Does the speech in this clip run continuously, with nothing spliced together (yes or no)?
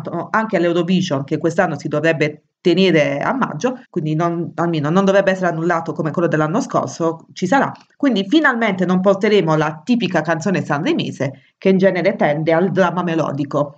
no